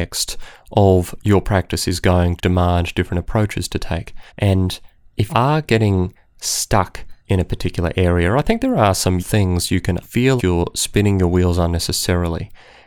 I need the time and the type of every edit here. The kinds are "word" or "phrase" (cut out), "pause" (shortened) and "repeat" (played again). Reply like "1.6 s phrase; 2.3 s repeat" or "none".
2.4 s word; 4.3 s pause; 5.3 s word; 7.2 s pause; 9.2 s word; 10.0 s phrase; 10.4 s word